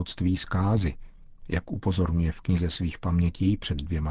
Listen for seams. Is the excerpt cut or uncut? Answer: uncut